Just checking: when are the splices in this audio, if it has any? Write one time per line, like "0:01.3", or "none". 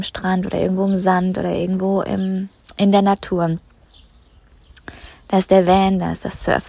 none